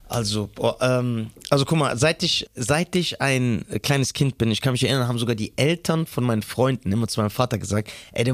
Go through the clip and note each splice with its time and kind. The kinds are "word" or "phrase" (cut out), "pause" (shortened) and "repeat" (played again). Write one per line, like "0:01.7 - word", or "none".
0:02.5 - word